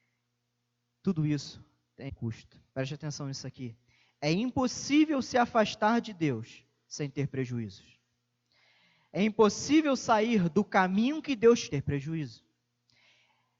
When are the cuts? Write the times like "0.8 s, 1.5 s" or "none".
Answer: 2.1 s, 2.7 s, 11.7 s